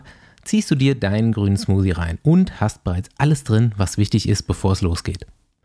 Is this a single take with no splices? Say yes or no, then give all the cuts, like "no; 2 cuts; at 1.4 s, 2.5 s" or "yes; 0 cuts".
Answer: yes; 0 cuts